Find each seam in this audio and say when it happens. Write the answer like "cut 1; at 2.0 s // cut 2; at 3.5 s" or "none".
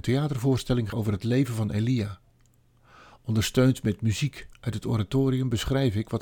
cut 1; at 0.9 s